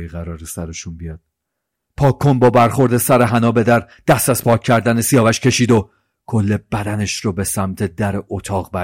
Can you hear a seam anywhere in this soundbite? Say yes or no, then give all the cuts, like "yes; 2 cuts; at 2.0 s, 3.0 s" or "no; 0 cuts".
no; 0 cuts